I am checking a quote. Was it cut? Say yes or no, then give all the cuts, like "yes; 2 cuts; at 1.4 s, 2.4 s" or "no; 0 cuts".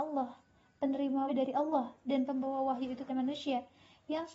yes; 2 cuts; at 1.3 s, 3.1 s